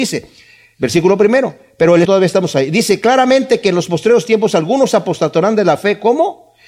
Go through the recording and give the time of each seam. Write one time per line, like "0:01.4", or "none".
0:02.0

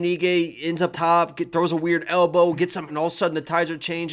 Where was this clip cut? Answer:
0:00.9
0:02.9

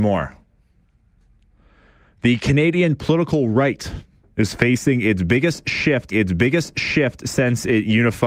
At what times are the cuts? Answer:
0:06.1

